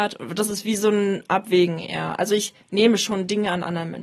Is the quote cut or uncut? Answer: uncut